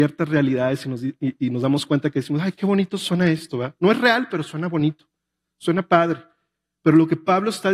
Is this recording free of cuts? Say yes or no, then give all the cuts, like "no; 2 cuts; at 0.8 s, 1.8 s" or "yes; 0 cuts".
yes; 0 cuts